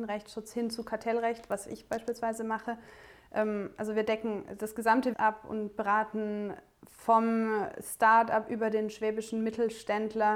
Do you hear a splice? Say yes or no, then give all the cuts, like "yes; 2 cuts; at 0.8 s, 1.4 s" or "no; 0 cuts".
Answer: yes; 1 cut; at 5.1 s